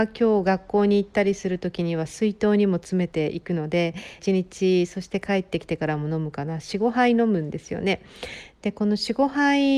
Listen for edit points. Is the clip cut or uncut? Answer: cut